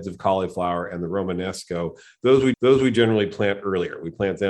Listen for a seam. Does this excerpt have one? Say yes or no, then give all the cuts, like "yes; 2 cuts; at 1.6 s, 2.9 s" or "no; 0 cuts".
yes; 1 cut; at 2.5 s